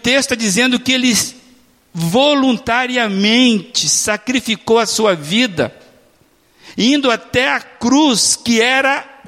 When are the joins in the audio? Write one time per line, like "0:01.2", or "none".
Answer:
none